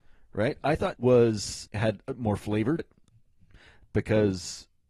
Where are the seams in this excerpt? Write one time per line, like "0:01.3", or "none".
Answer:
0:00.9
0:01.7
0:02.8